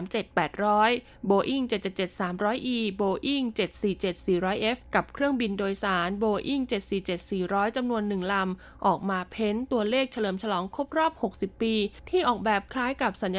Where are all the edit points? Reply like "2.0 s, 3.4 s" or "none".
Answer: none